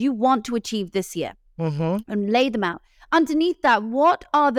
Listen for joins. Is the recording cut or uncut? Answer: uncut